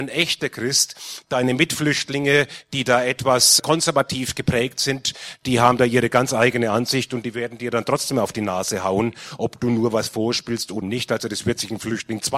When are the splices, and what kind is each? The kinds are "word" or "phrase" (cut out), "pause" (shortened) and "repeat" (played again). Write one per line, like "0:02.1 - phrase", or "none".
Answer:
0:03.6 - word
0:10.8 - word

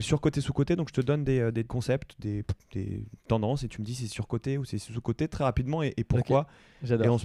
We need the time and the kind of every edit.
0:01.7 - word

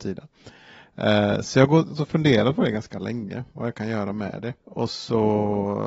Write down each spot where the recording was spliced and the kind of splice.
0:04.6 - pause

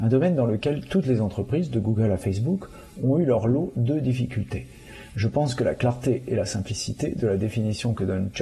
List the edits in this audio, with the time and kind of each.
none

